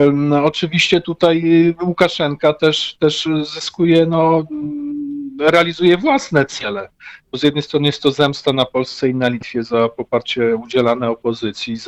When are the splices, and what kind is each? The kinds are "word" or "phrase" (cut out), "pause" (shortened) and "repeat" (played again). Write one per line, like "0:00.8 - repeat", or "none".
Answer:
none

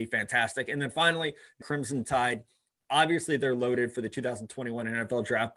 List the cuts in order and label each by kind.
0:01.6 - word

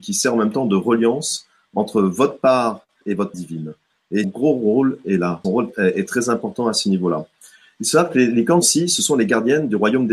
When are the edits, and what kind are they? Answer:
0:03.0 - word
0:03.3 - word
0:04.2 - word
0:05.4 - word
0:08.6 - word

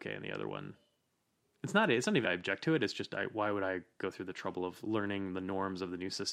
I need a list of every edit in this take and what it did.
0:02.2 - word
0:04.8 - word

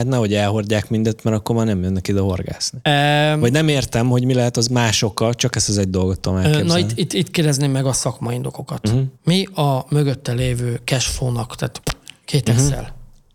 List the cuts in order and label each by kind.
0:09.1 - pause

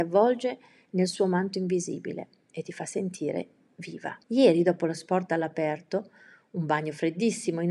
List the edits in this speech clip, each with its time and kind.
0:04.2 - pause

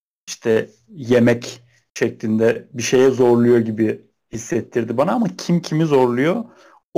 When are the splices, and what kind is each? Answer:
none

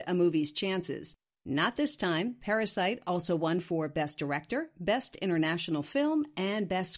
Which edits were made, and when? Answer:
none

